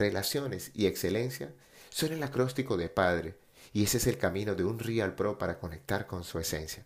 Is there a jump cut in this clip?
no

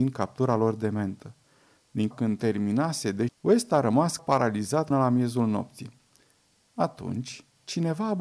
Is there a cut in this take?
yes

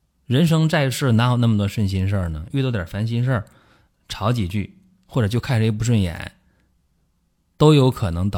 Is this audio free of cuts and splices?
yes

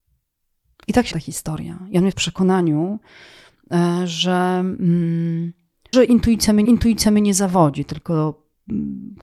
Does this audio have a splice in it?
yes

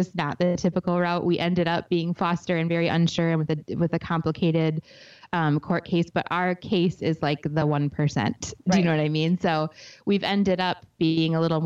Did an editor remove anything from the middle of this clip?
no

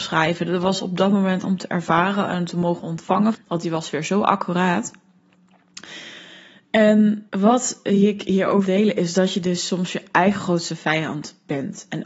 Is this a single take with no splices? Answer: no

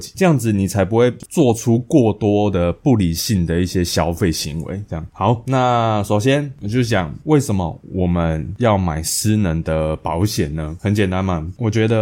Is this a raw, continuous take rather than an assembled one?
yes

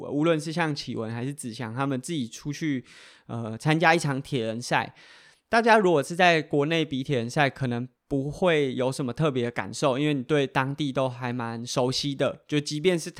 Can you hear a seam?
no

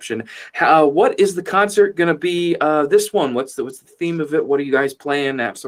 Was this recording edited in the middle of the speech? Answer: no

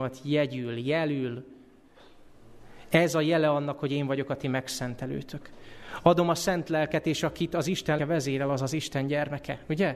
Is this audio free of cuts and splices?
no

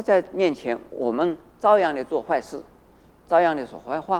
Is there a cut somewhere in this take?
no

